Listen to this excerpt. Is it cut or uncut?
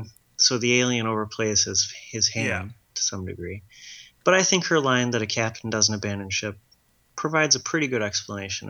uncut